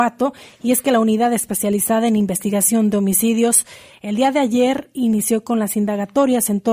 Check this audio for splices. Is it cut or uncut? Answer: uncut